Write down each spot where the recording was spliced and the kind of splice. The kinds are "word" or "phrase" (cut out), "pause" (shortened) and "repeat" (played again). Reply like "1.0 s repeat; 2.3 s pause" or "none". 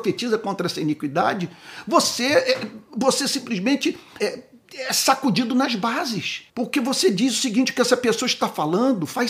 4.2 s word; 6.5 s pause